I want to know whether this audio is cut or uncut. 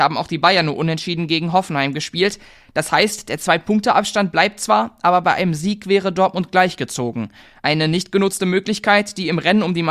uncut